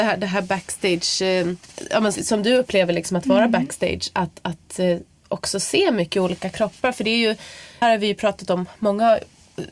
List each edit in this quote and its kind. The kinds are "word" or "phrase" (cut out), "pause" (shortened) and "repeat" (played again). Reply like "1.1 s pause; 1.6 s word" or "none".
2.2 s word; 7.8 s phrase